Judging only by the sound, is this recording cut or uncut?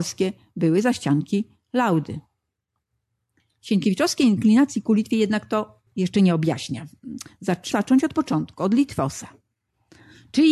cut